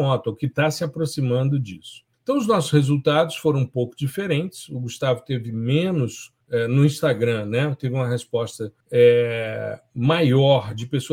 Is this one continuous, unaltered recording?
no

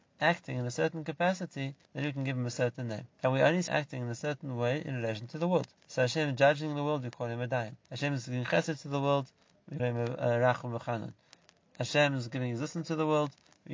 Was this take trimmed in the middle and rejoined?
yes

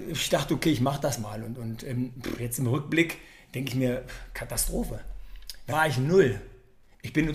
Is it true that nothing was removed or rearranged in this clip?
no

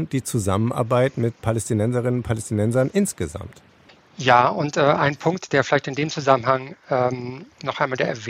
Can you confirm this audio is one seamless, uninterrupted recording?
yes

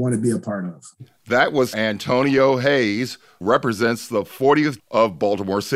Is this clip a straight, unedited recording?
no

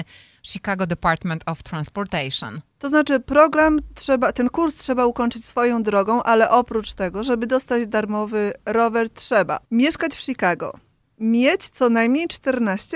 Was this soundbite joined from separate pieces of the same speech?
yes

